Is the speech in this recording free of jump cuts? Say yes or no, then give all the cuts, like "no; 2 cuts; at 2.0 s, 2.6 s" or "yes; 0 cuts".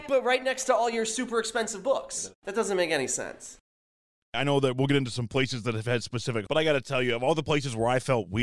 no; 1 cut; at 6.5 s